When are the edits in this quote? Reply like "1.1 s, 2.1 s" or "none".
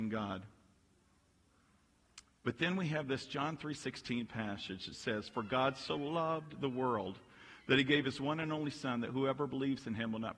none